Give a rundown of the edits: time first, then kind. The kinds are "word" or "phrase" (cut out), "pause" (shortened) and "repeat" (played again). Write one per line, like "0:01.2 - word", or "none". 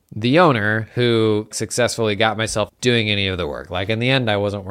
0:01.5 - word
0:02.7 - phrase